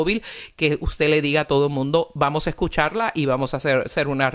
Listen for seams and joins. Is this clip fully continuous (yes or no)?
yes